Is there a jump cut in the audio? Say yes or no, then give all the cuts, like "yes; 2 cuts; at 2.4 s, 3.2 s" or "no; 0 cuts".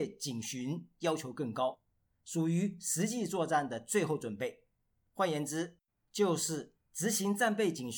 no; 0 cuts